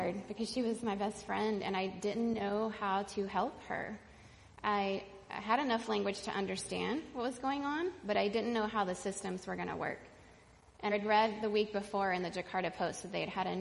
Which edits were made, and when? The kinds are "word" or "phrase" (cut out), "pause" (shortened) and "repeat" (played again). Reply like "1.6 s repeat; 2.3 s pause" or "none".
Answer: 10.9 s word